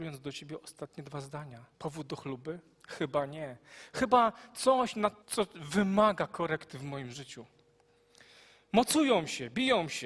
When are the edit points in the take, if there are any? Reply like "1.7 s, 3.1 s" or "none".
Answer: 1.7 s, 5.2 s